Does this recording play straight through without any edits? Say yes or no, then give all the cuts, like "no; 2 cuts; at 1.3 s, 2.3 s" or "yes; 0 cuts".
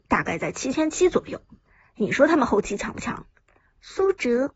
no; 1 cut; at 3.3 s